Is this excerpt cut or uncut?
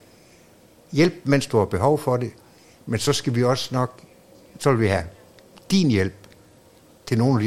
uncut